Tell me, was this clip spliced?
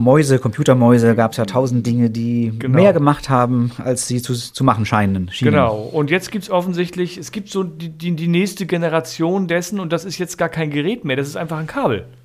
no; 0 cuts

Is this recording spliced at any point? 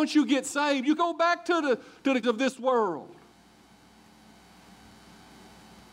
yes; 2 cuts; at 1.0 s, 2.2 s

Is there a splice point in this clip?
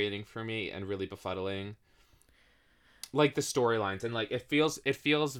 no; 0 cuts

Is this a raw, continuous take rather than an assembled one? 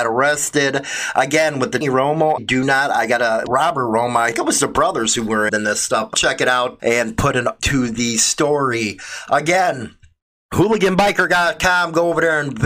no; 8 cuts; at 1.8 s, 2.4 s, 3.5 s, 4.3 s, 5.5 s, 6.1 s, 6.8 s, 7.6 s

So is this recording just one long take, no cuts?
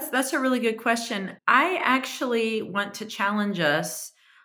no; 1 cut; at 1.4 s

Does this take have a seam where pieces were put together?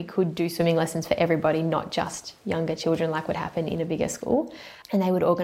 no; 0 cuts

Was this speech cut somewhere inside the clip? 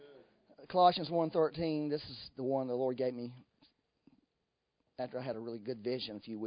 no; 0 cuts

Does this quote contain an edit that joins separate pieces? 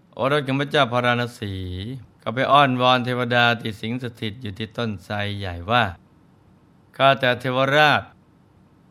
yes; 1 cut; at 2.1 s

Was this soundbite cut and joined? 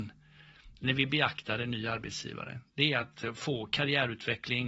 no; 0 cuts

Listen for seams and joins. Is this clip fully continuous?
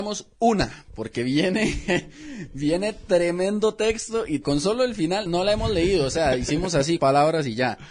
no; 3 cuts; at 4.4 s, 5.3 s, 7.0 s

